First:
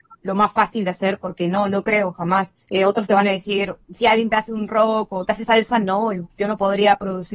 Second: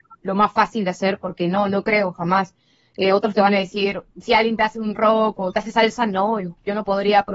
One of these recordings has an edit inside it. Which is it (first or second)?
first